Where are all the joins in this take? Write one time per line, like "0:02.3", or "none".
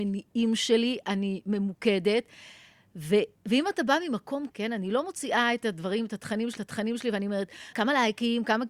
0:03.4
0:04.5
0:06.6
0:07.7